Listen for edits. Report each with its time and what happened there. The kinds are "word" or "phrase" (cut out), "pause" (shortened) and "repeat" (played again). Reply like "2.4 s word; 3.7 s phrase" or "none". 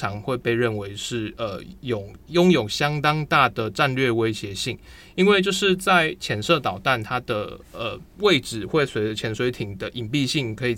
8.1 s pause

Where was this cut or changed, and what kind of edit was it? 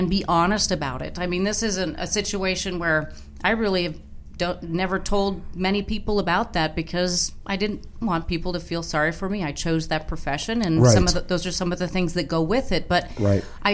none

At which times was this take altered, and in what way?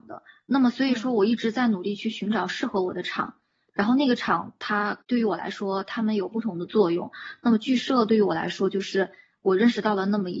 5.0 s pause

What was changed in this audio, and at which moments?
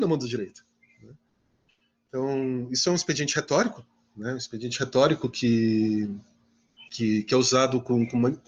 6.9 s pause

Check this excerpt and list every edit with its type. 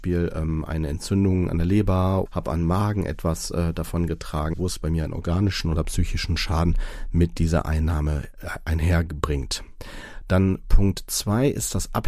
2.3 s word; 4.5 s word

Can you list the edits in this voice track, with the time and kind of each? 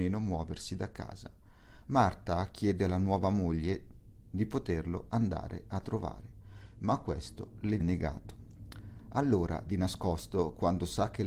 7.8 s word

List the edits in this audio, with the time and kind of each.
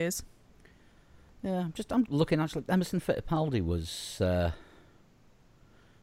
2.1 s word

